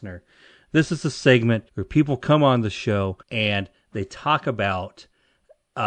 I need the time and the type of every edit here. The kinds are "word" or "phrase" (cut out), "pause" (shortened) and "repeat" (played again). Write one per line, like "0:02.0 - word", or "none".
0:01.7 - pause
0:03.2 - pause